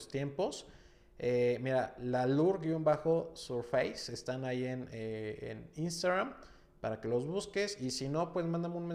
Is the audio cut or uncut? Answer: uncut